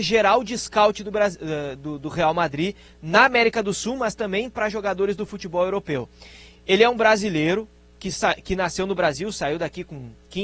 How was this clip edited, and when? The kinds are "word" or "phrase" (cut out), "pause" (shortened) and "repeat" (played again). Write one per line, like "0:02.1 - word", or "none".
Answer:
none